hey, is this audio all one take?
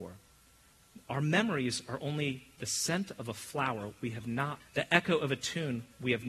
no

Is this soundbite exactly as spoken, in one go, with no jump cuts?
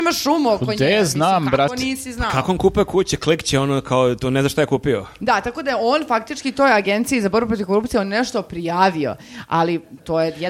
yes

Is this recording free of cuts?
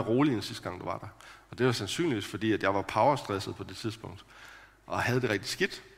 yes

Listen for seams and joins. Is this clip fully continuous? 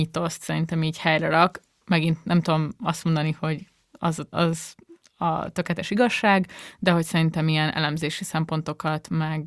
no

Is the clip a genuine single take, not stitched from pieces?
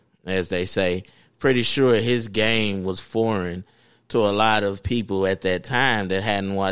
yes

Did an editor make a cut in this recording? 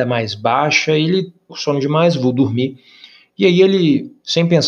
yes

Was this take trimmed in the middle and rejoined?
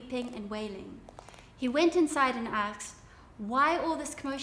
no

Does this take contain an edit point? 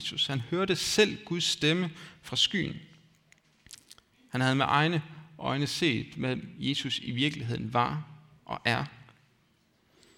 no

